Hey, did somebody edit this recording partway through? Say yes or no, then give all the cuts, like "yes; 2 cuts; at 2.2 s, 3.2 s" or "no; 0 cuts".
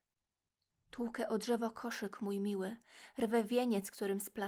no; 0 cuts